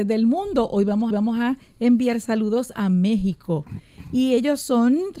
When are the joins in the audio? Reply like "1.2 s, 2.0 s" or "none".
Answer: 1.1 s